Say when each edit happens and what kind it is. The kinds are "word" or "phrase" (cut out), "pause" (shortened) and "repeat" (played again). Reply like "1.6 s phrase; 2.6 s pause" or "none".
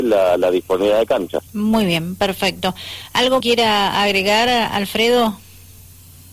1.5 s pause; 3.4 s phrase